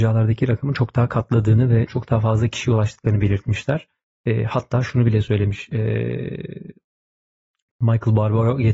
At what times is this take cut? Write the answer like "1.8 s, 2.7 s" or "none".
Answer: none